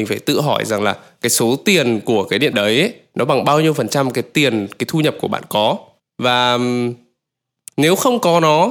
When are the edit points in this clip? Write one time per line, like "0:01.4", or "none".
0:02.5
0:06.0